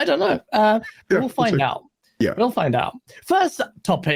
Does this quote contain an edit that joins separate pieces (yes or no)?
no